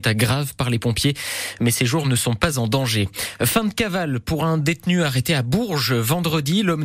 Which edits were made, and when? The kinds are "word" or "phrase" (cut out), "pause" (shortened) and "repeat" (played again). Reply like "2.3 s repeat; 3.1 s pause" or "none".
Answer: none